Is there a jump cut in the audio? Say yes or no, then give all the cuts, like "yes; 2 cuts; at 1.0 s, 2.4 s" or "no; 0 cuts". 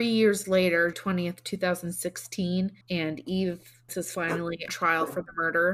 yes; 4 cuts; at 0.9 s, 2.8 s, 3.9 s, 4.7 s